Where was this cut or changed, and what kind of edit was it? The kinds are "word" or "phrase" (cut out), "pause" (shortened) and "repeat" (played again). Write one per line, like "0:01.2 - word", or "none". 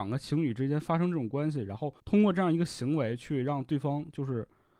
0:02.0 - pause